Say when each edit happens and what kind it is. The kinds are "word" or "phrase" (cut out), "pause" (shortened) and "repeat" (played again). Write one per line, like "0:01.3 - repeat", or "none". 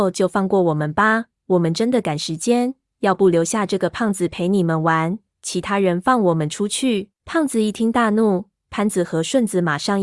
0:07.2 - pause